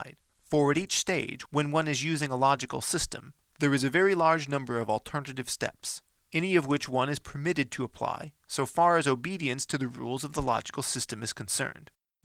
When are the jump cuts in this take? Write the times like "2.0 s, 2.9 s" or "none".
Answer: 8.4 s